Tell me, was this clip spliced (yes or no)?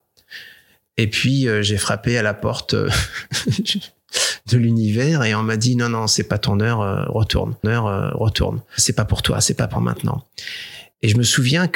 yes